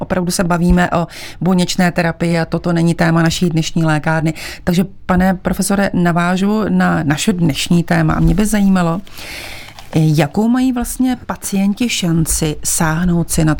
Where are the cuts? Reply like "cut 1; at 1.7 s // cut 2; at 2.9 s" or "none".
none

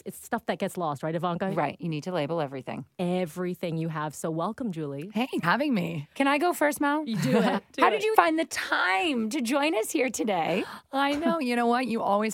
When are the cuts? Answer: cut 1; at 5.4 s // cut 2; at 6.1 s // cut 3; at 8.1 s

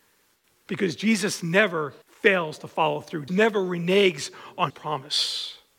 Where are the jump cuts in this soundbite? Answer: cut 1; at 2.0 s // cut 2; at 3.3 s // cut 3; at 4.7 s

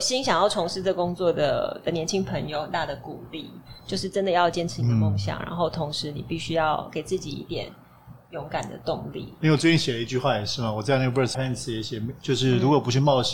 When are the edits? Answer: cut 1; at 11.3 s

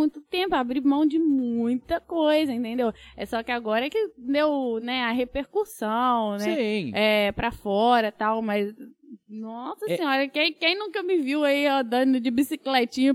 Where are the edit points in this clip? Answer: none

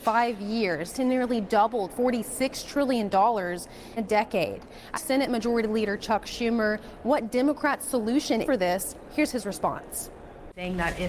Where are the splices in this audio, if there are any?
cut 1; at 0.9 s // cut 2; at 1.9 s // cut 3; at 4.0 s // cut 4; at 4.9 s // cut 5; at 8.4 s

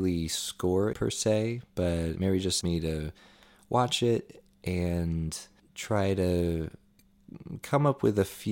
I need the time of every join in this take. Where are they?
cut 1; at 0.9 s // cut 2; at 2.2 s // cut 3; at 2.6 s

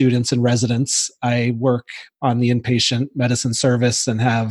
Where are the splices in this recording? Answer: none

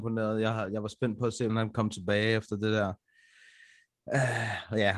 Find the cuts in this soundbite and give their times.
cut 1; at 1.5 s

